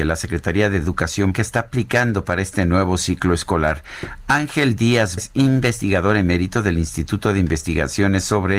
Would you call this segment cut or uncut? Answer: cut